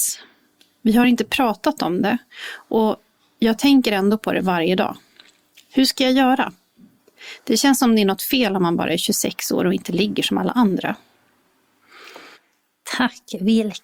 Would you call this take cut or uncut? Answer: uncut